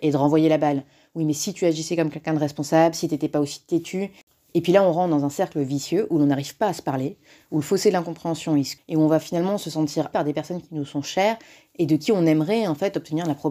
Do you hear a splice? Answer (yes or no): yes